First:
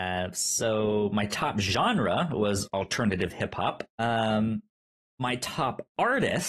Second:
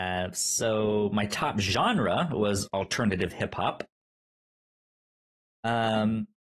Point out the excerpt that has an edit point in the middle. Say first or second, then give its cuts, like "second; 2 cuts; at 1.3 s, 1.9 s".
first; 1 cut; at 3.9 s